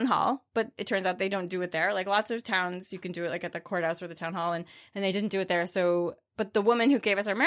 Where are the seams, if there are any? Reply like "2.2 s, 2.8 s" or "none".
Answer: none